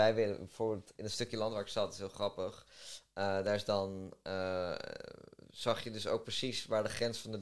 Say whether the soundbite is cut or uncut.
uncut